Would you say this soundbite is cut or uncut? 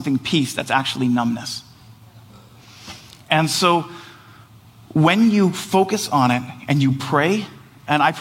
uncut